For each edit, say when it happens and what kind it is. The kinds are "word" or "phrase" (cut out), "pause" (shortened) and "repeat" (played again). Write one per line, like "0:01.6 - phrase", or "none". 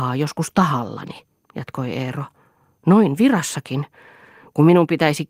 none